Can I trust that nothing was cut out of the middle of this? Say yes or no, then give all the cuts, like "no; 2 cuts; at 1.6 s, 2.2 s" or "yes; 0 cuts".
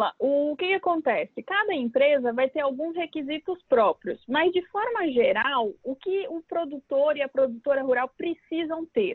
yes; 0 cuts